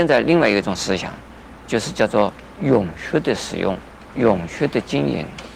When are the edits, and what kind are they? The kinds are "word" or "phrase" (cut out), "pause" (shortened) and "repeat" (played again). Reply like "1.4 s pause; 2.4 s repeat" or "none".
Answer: 4.1 s word

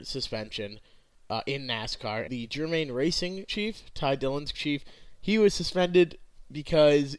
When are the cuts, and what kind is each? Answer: 2.3 s phrase; 3.5 s word; 4.5 s word

